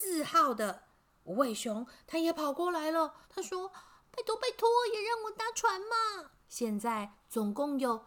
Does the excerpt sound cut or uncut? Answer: cut